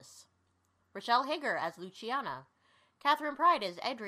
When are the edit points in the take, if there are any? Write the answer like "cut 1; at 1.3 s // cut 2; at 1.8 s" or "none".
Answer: none